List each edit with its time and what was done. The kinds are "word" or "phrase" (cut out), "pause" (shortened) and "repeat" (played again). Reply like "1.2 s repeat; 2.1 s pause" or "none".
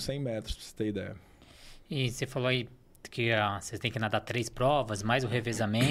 none